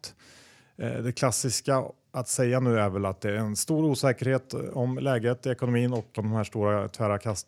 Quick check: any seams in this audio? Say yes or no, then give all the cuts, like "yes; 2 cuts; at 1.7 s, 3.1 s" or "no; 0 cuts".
yes; 1 cut; at 6.2 s